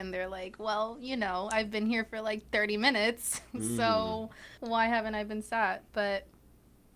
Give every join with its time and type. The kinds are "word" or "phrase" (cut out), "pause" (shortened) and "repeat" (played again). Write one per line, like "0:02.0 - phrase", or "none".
0:04.6 - pause
0:05.9 - pause